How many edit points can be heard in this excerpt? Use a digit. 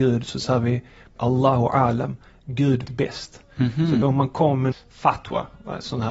4